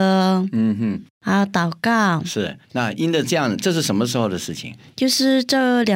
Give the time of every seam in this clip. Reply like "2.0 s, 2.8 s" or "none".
1.1 s, 2.6 s